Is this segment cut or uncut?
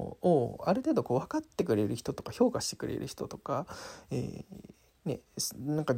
cut